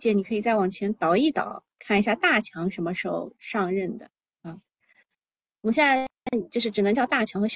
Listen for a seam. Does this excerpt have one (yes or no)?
no